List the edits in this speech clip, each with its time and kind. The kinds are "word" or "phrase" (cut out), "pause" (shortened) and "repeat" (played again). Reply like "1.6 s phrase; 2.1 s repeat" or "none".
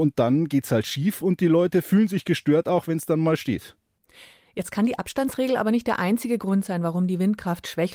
none